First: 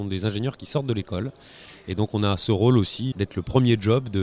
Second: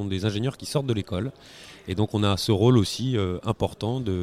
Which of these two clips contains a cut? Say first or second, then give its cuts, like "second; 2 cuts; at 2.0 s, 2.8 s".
first; 1 cut; at 3.1 s